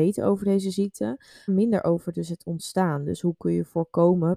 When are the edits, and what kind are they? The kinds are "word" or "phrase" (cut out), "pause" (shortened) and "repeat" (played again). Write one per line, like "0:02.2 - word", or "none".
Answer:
0:01.5 - word